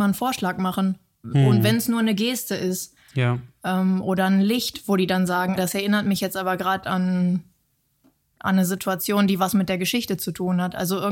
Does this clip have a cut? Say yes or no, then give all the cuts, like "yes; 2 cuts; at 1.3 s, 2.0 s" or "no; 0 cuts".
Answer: yes; 1 cut; at 5.6 s